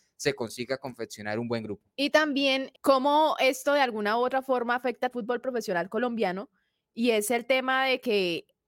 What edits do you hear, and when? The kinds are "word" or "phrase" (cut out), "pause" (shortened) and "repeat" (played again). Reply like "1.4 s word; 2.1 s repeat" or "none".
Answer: 2.7 s word; 5.1 s phrase